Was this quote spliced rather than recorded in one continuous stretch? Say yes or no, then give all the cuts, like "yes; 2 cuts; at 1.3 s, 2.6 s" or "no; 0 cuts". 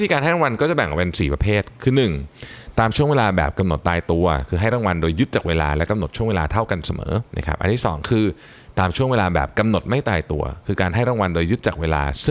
yes; 1 cut; at 7.3 s